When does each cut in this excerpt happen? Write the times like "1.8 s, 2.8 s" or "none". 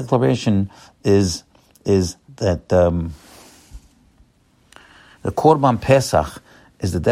2.3 s